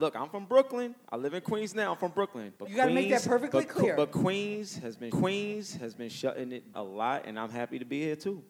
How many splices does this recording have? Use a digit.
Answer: 3